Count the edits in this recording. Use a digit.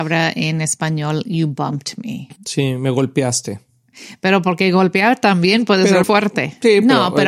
2